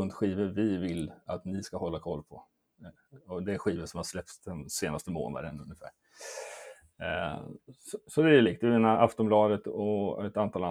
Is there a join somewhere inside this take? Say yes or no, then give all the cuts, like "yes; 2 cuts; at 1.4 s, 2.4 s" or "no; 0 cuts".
no; 0 cuts